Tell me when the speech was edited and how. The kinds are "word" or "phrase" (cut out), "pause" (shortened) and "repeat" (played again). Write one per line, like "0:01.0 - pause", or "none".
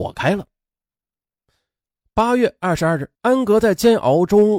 0:03.1 - pause